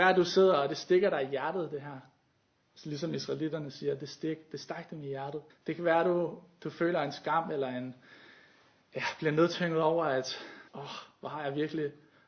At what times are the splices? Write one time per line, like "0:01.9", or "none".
0:05.5
0:10.7